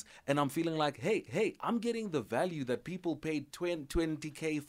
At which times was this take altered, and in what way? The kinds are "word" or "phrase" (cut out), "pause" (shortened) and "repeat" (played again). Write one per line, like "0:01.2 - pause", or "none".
0:01.3 - repeat